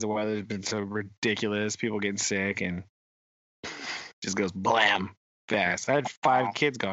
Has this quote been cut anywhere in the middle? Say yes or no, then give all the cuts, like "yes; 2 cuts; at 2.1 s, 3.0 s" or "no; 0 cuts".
no; 0 cuts